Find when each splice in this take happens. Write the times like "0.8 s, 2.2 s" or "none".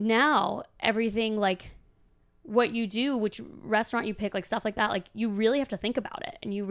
none